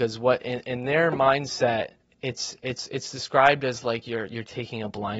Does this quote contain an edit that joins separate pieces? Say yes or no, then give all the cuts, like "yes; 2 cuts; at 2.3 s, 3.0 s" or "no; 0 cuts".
yes; 1 cut; at 2.0 s